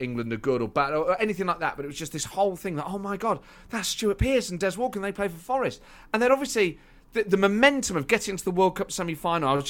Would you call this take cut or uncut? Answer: uncut